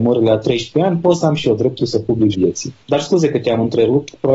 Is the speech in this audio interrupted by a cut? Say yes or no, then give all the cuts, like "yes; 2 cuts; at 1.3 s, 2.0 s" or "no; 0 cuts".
yes; 1 cut; at 2.3 s